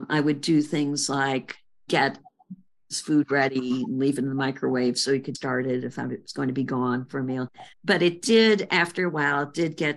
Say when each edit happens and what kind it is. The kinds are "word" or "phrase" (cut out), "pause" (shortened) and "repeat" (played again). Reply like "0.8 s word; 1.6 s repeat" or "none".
1.9 s word; 5.3 s word; 7.7 s pause